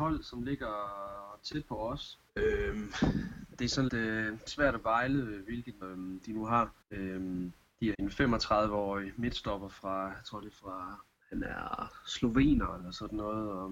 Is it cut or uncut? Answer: cut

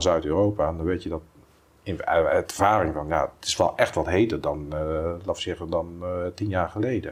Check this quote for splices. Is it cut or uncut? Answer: uncut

